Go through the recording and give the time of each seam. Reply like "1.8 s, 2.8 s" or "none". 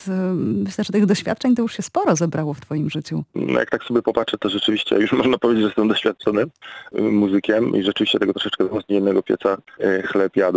3.3 s

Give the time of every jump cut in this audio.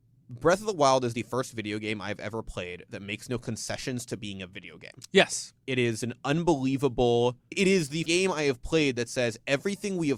7.5 s, 8.1 s

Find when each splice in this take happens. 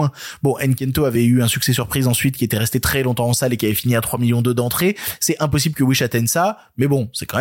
none

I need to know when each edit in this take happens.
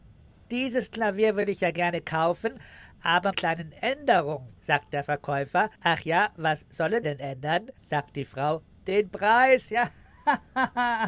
3.3 s, 4.6 s, 5.7 s, 7.0 s, 7.8 s

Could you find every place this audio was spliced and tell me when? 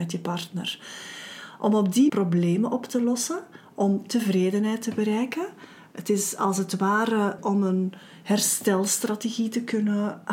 2.1 s, 7.4 s

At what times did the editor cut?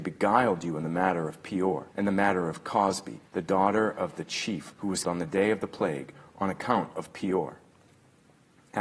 1.9 s, 3.3 s, 4.7 s, 5.0 s

